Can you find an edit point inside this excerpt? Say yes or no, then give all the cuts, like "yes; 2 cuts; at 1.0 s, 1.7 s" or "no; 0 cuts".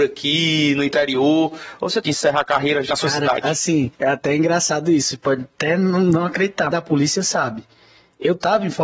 yes; 4 cuts; at 2.0 s, 2.9 s, 3.9 s, 6.7 s